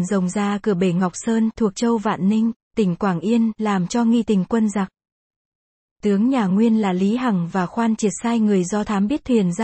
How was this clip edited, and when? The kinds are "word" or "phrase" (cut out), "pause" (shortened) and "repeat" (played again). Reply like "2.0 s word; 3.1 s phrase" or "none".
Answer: none